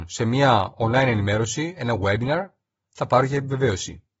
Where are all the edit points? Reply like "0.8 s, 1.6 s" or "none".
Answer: none